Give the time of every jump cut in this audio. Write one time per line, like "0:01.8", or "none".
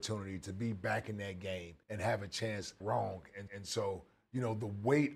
0:01.8
0:02.8
0:03.5

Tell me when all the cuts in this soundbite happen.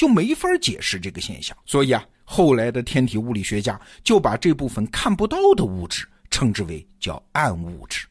0:01.6

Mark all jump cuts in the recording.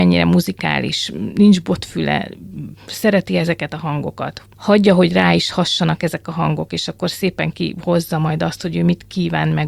none

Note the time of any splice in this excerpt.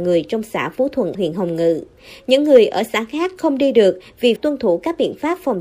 0:01.1
0:04.4

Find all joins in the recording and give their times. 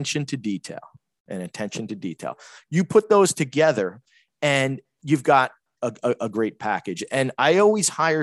none

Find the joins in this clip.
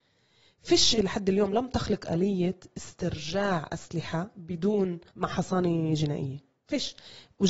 0:01.0
0:05.1

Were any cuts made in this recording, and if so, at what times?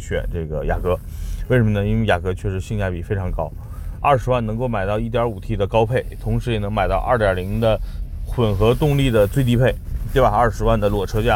0:04.0

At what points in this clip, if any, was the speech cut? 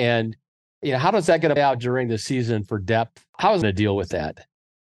0:01.6
0:03.3
0:03.6

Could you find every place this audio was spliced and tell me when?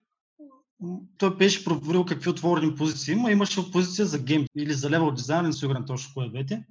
0:01.2
0:04.5
0:05.5

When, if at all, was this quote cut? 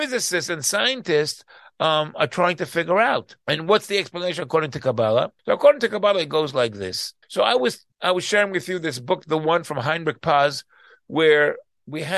0:03.4
0:05.4
0:07.2
0:07.9

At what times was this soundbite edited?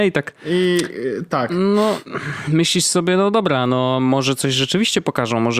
none

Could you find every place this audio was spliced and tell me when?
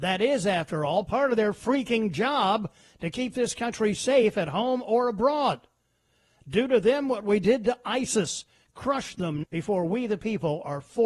0:09.4

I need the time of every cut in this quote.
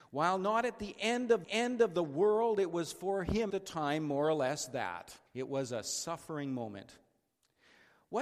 0:01.4
0:03.5
0:05.3

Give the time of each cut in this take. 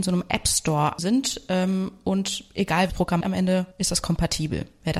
0:01.0
0:02.9
0:03.2
0:03.7

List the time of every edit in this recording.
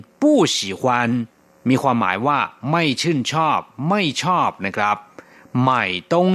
none

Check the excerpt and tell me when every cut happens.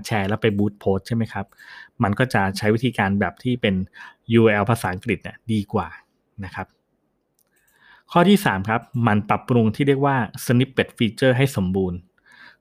none

